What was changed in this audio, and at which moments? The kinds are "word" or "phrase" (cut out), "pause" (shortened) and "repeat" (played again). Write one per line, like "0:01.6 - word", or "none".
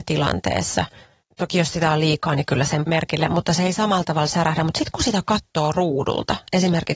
0:02.9 - word